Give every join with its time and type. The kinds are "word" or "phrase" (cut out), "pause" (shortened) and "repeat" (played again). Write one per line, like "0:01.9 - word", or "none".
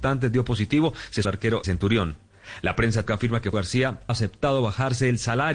0:01.2 - word
0:01.6 - word
0:03.1 - word
0:03.5 - word
0:04.1 - word